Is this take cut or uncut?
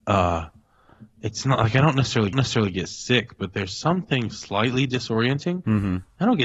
cut